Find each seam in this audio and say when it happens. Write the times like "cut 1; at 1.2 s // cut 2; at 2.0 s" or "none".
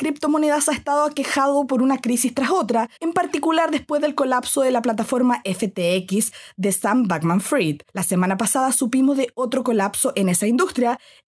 cut 1; at 3.0 s // cut 2; at 7.9 s